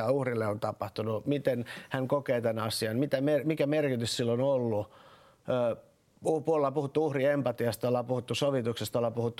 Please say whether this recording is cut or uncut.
uncut